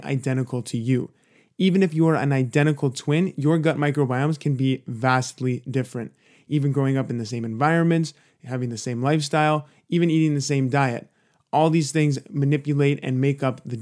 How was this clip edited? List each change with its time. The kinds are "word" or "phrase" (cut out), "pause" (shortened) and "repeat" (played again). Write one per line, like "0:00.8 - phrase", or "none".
none

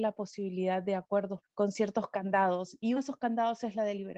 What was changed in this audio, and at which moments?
0:01.4 - word
0:03.0 - word

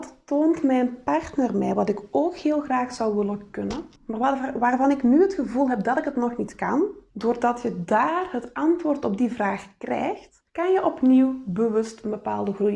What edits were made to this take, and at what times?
0:04.0 - pause
0:07.1 - pause
0:10.5 - pause

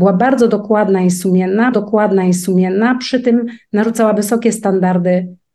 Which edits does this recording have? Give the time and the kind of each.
0:01.7 - repeat
0:04.2 - word

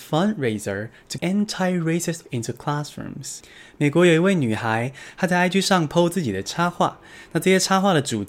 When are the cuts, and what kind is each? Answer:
0:01.2 - word
0:02.3 - word

